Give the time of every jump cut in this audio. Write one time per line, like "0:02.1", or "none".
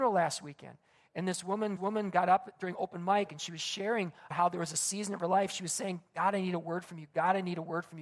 0:01.8
0:04.3